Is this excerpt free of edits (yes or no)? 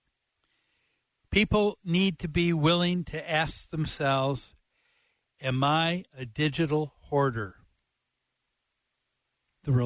yes